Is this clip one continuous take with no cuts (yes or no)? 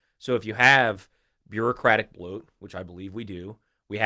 yes